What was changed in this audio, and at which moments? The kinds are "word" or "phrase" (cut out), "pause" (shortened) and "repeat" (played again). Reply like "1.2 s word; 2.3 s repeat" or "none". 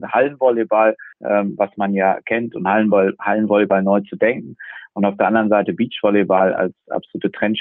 1.1 s pause